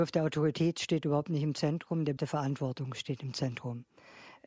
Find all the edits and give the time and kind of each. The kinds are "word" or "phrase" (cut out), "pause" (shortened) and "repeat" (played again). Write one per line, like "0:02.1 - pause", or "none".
0:02.2 - word

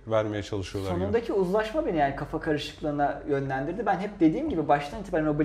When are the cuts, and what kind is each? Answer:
none

